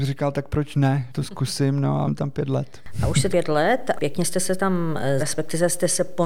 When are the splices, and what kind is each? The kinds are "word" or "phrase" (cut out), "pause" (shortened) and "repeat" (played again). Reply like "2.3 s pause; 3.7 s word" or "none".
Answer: 1.1 s word; 2.0 s word; 3.3 s word; 4.0 s word; 5.2 s word